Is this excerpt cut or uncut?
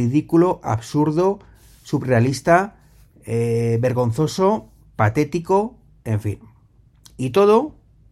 uncut